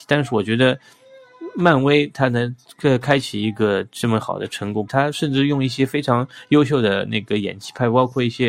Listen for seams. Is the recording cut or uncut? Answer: cut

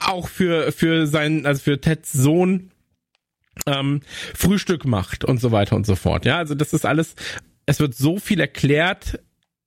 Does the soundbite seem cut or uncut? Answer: cut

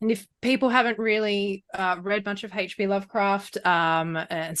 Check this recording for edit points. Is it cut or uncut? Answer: uncut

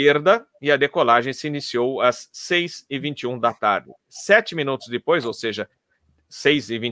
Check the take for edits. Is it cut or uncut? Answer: uncut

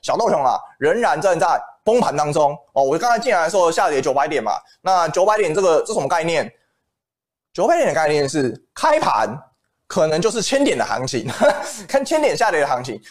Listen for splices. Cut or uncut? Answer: cut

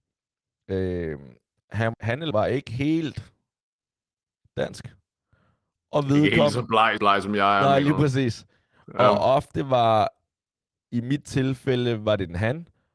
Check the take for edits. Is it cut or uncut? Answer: cut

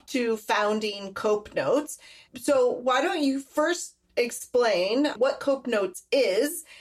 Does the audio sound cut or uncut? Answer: uncut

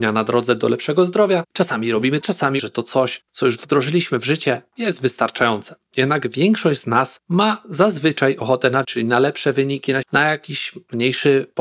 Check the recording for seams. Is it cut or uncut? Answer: cut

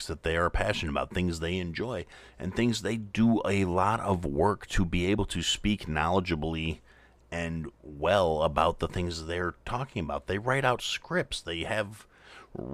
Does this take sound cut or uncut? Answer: uncut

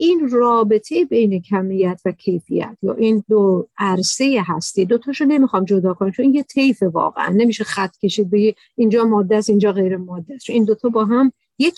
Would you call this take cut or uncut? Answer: uncut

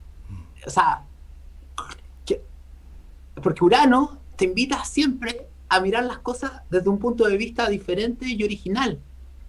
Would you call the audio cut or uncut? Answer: uncut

